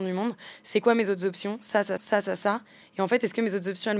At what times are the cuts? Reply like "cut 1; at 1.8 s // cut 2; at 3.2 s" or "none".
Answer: cut 1; at 2.0 s